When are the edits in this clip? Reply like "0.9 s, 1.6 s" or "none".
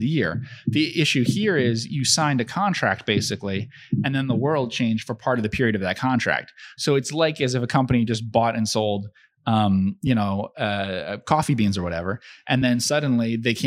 none